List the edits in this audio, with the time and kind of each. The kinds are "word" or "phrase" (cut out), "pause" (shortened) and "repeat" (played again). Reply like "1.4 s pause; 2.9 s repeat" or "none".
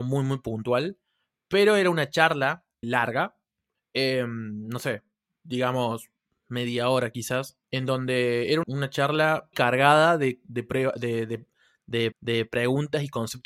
2.8 s word; 3.8 s pause; 7.6 s pause; 8.6 s word; 9.5 s word; 12.1 s repeat